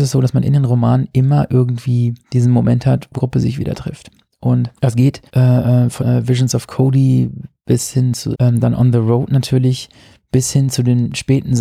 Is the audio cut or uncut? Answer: cut